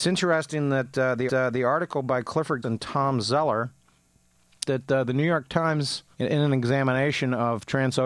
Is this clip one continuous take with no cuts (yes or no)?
no